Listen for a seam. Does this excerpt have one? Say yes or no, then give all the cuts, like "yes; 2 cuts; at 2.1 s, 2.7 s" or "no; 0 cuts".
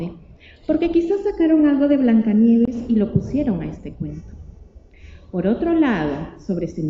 no; 0 cuts